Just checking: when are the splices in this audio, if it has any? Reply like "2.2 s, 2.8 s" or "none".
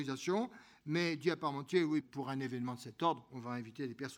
2.0 s